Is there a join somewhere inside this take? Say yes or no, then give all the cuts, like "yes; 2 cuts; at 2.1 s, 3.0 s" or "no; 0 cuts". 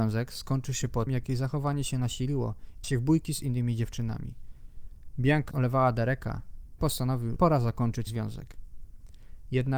yes; 6 cuts; at 1.1 s, 2.8 s, 5.5 s, 6.8 s, 7.4 s, 8.1 s